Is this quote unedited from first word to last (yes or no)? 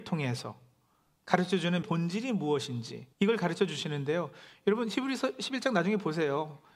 no